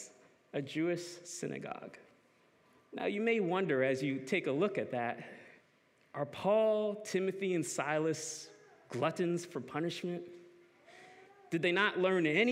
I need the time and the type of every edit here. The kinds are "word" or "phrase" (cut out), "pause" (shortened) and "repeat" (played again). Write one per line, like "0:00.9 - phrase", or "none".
0:02.4 - pause
0:05.6 - pause